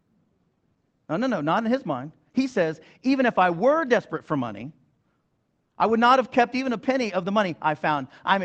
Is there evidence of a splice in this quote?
no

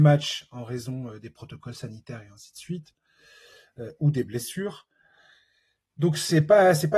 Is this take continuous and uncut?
yes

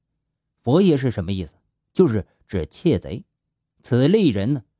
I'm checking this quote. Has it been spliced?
no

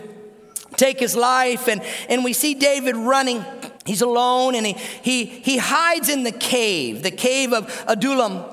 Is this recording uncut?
no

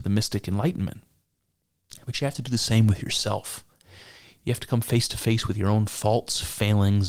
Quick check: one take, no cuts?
yes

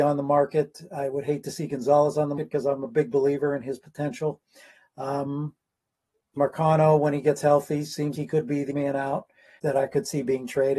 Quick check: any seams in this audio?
yes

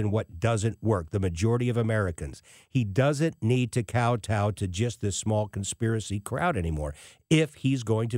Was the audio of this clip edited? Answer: no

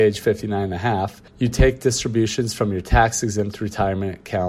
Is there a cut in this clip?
yes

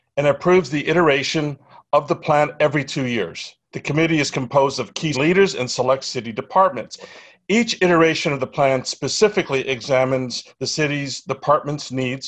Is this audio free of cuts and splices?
no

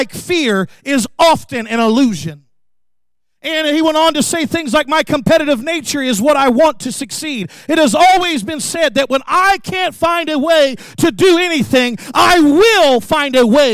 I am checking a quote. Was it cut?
no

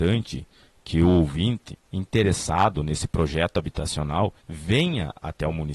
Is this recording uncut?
no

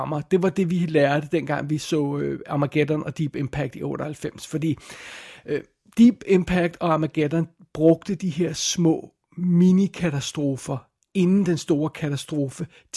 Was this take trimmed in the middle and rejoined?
no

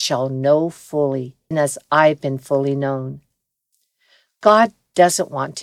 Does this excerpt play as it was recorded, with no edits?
no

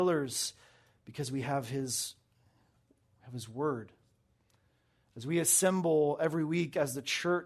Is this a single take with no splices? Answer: yes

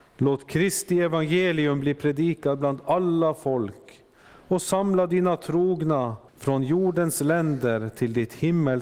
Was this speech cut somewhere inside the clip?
yes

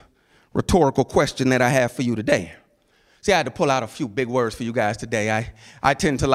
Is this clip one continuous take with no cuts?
yes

